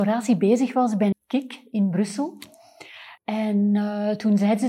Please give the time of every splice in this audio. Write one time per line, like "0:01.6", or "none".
0:01.1
0:03.2